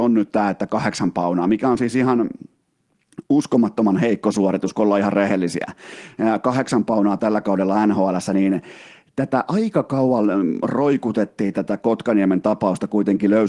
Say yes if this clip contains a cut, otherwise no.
no